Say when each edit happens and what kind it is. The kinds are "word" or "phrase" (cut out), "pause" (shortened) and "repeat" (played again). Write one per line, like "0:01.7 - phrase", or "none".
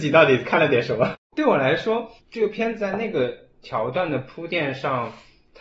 0:01.2 - pause
0:02.2 - pause